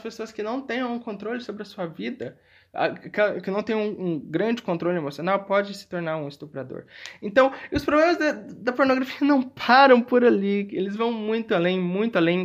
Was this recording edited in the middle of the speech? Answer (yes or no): no